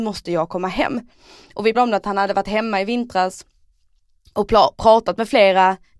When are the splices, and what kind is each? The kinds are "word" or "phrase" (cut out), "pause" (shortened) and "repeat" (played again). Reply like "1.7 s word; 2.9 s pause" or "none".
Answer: 1.7 s word